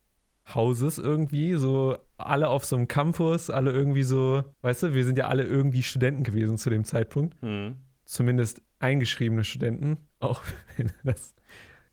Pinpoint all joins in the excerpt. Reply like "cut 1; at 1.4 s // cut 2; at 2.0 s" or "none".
cut 1; at 4.5 s